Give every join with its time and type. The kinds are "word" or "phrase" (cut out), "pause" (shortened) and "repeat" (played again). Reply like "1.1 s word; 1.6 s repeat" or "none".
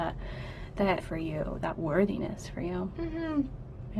1.0 s word

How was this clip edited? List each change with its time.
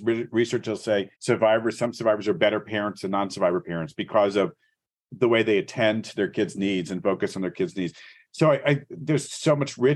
1.2 s pause

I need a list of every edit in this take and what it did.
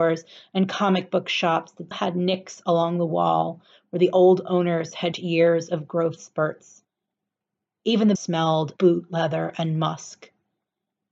1.9 s word; 5.1 s word; 8.1 s word; 8.8 s word

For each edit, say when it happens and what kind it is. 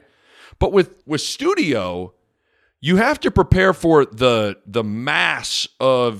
1.0 s pause

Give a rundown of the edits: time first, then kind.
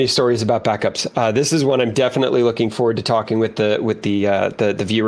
none

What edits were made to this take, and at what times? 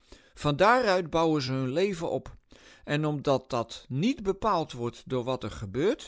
none

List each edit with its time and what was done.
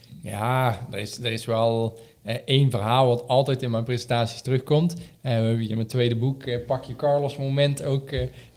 none

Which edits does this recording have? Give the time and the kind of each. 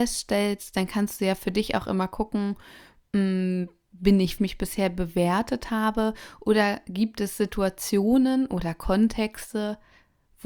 4.4 s phrase

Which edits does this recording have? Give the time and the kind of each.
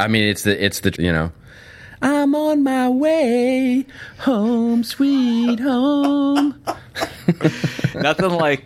0.9 s word

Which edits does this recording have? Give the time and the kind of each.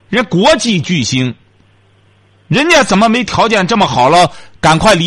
none

